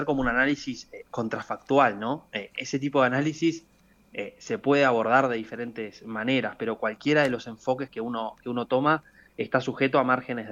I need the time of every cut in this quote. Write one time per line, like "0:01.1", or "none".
none